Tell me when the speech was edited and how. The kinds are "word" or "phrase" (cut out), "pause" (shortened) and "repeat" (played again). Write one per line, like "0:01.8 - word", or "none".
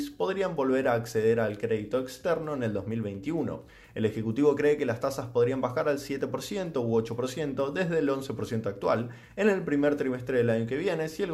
none